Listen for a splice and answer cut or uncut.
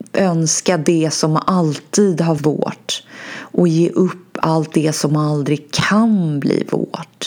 cut